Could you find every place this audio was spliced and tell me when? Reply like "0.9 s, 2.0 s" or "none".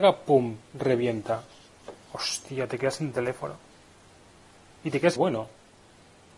5.2 s